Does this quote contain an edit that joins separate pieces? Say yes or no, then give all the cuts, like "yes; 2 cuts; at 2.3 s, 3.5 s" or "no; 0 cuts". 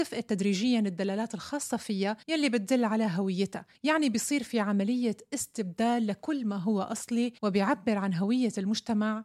yes; 3 cuts; at 2.2 s, 3.7 s, 7.4 s